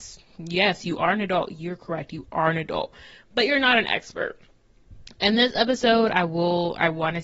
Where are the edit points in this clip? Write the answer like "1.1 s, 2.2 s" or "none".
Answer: none